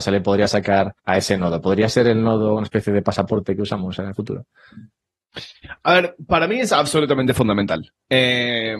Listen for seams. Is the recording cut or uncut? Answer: cut